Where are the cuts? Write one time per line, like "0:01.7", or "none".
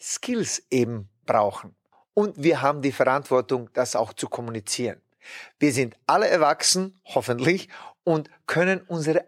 none